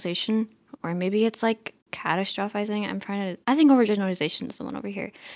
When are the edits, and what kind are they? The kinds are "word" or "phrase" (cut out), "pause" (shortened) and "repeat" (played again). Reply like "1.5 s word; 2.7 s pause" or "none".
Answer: 1.8 s pause; 3.4 s pause